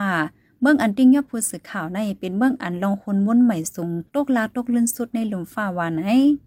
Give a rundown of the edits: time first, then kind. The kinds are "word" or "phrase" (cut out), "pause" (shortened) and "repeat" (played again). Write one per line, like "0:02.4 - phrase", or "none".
0:04.1 - pause